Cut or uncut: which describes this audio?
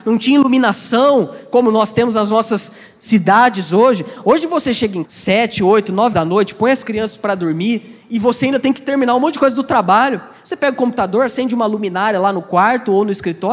cut